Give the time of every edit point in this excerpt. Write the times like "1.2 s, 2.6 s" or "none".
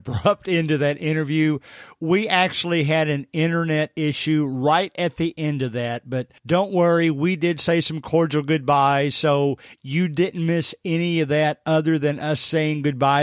6.4 s